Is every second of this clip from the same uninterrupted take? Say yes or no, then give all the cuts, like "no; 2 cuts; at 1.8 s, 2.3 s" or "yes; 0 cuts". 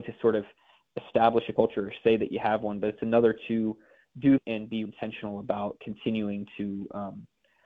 no; 2 cuts; at 4.4 s, 4.9 s